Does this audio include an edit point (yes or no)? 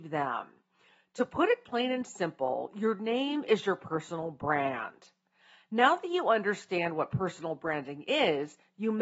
no